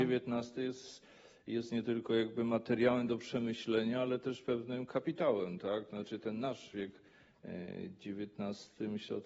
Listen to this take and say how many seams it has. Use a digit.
0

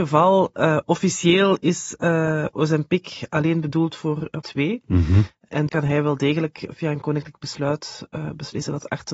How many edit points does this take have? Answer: 3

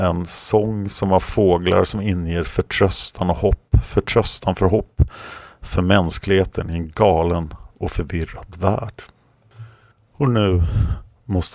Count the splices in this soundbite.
0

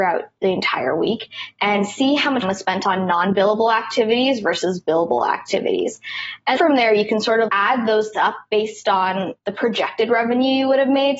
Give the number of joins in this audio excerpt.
5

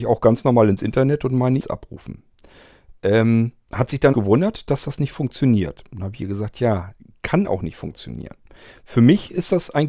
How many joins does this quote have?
2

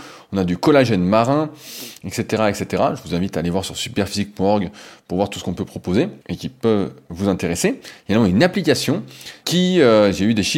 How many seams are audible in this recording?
2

